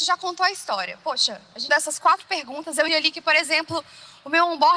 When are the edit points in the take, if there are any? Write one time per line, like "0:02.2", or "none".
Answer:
0:01.7
0:02.9